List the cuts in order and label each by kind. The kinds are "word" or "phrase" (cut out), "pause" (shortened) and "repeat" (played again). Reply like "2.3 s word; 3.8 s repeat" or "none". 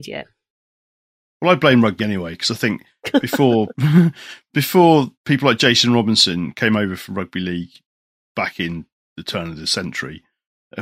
2.0 s word; 5.1 s pause; 9.0 s pause

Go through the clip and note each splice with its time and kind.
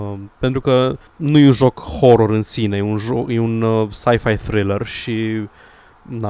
1.1 s pause

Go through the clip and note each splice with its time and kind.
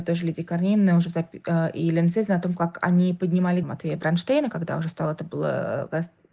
3.6 s word

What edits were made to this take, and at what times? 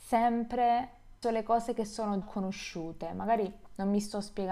1.2 s word; 2.2 s word

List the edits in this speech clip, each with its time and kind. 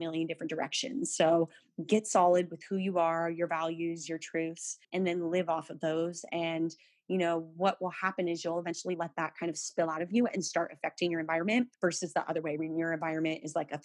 4.8 s pause; 11.7 s pause

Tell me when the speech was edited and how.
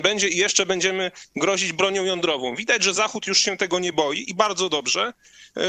none

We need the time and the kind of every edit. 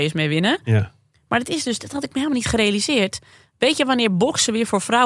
none

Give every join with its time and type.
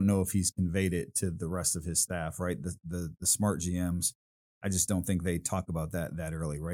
none

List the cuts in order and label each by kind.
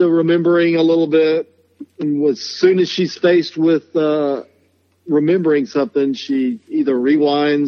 none

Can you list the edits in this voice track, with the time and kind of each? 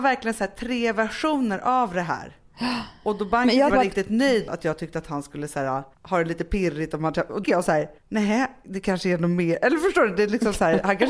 3.7 s phrase; 4.5 s word; 5.9 s pause; 7.4 s phrase; 8.0 s pause

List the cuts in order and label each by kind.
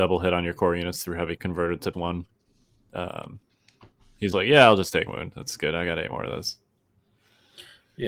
1.4 s word; 1.9 s word; 4.3 s word; 5.1 s word; 5.6 s word

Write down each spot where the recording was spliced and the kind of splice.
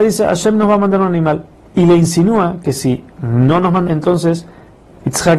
1.5 s pause; 3.1 s pause; 3.9 s phrase

